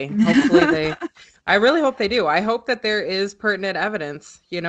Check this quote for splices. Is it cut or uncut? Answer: uncut